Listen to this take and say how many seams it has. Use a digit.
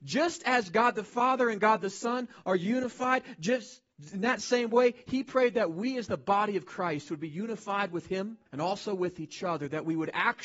1